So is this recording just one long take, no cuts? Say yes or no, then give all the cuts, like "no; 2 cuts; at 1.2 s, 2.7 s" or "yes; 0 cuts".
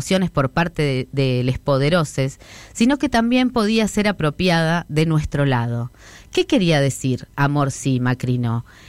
yes; 0 cuts